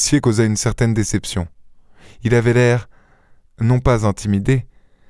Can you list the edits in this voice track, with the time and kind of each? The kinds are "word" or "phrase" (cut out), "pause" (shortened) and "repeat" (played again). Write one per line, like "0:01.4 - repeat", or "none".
none